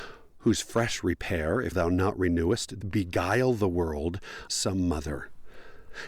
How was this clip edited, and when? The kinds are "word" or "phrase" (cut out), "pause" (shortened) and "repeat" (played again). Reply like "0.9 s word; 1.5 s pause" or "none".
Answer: 1.7 s word; 2.8 s word; 4.5 s word